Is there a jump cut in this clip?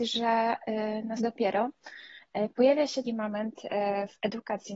yes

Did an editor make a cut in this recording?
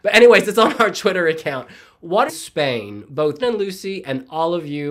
yes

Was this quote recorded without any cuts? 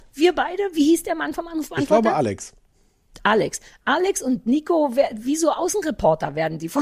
yes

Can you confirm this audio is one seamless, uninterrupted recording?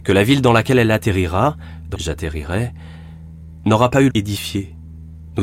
no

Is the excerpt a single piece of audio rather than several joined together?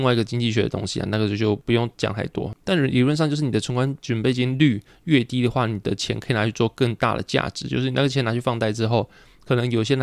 no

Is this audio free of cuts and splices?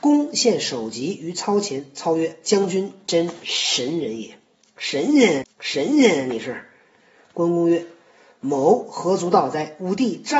no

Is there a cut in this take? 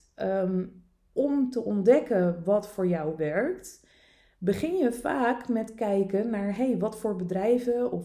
no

